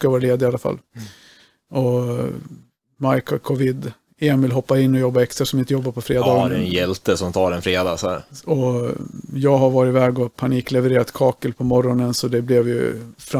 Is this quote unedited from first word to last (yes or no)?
yes